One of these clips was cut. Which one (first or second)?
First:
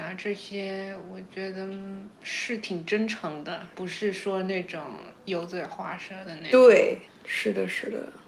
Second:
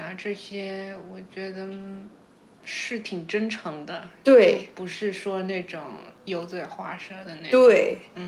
first